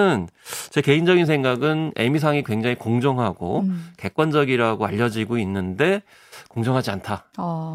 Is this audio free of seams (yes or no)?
yes